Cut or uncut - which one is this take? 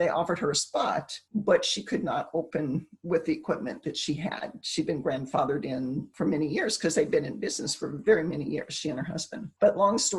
uncut